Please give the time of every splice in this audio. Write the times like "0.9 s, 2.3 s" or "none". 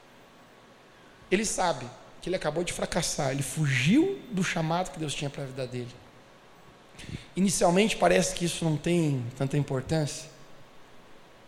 none